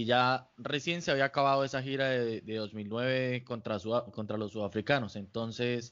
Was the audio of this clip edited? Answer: no; 0 cuts

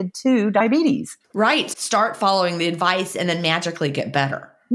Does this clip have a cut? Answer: yes; 2 cuts; at 1.2 s, 1.7 s

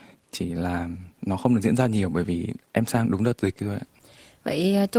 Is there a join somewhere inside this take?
yes; 1 cut; at 1.1 s

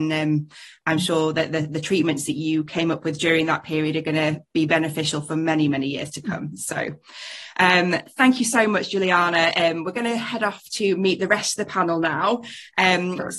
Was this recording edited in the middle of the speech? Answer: no; 0 cuts

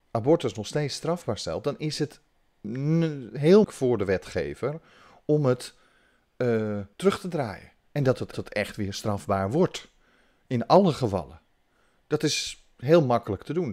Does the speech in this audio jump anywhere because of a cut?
yes; 4 cuts; at 3.6 s, 6.9 s, 7.8 s, 8.3 s

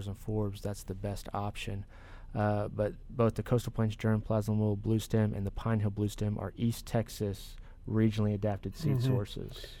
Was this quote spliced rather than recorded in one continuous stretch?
no; 0 cuts

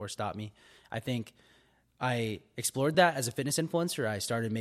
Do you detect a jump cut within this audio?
no; 0 cuts

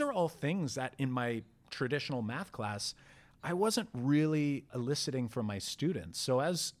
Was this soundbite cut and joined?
yes; 1 cut; at 4.7 s

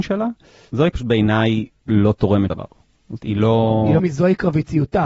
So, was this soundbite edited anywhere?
yes; 4 cuts; at 0.9 s, 2.5 s, 3.2 s, 4.0 s

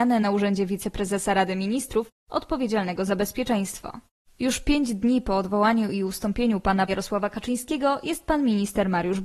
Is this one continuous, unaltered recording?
no; 1 cut; at 6.9 s

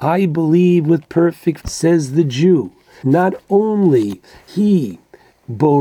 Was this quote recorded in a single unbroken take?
no; 3 cuts; at 1.6 s, 3.0 s, 4.5 s

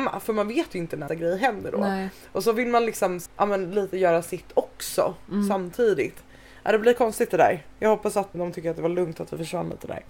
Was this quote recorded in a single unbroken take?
no; 3 cuts; at 1.1 s, 3.3 s, 8.3 s

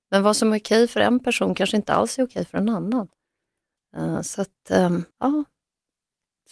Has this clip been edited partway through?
yes; 1 cut; at 5.1 s

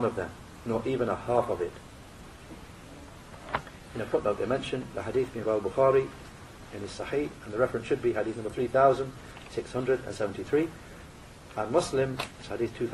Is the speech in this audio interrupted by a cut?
yes; 1 cut; at 5.4 s

